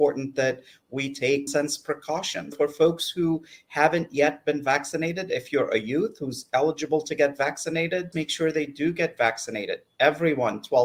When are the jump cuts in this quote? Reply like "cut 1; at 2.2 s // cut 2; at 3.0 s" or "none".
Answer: cut 1; at 1.5 s // cut 2; at 2.5 s // cut 3; at 8.1 s